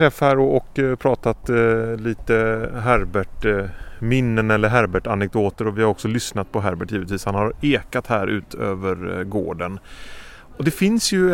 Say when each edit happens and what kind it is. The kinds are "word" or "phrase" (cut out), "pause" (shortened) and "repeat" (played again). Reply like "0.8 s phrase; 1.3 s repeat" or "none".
none